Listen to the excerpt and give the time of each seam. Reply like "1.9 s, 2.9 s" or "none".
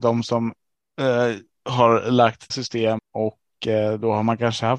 2.5 s, 3.0 s

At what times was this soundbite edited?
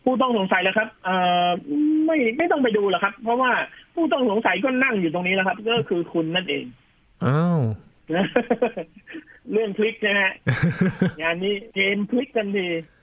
11.7 s

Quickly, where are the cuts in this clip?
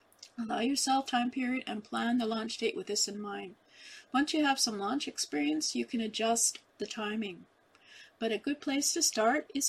1.1 s

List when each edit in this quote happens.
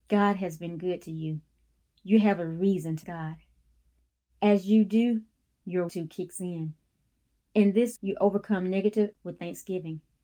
3.0 s, 5.9 s, 8.0 s, 9.1 s

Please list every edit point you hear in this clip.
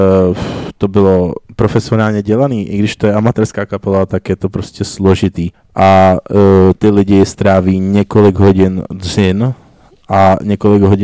5.5 s

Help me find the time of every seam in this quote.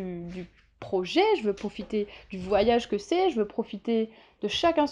none

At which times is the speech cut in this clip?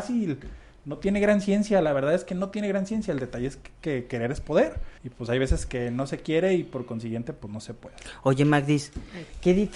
5.0 s

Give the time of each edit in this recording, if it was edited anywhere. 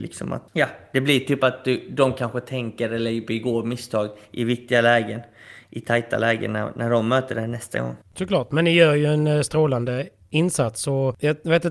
none

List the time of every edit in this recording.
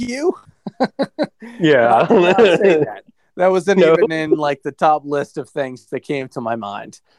none

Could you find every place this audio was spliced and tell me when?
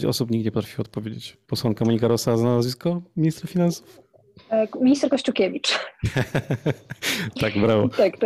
1.4 s

